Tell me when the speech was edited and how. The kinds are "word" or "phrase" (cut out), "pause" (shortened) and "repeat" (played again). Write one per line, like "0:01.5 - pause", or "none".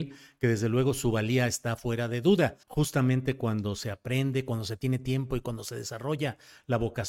0:02.6 - pause

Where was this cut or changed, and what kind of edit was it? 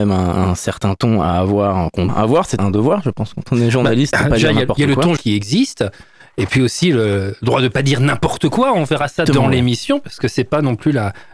0:02.1 - word
0:02.6 - word
0:05.2 - word
0:09.3 - word

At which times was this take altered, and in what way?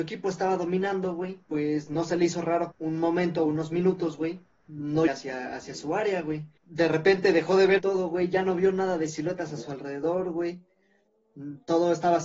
0:01.4 - pause
0:02.7 - phrase
0:05.1 - phrase
0:06.6 - pause
0:07.8 - word

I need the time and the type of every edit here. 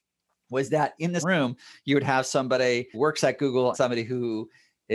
0:01.2 - word
0:02.9 - word
0:03.7 - word

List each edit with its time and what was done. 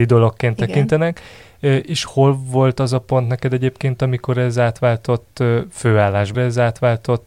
0:06.3 - repeat

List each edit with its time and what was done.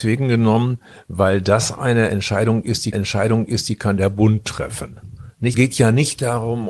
0:02.9 - repeat
0:05.5 - word

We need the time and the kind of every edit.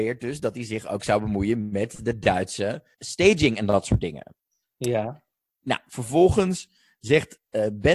0:02.9 - word

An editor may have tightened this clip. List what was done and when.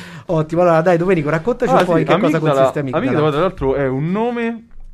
none

